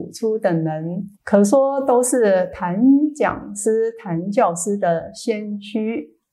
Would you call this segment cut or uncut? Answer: cut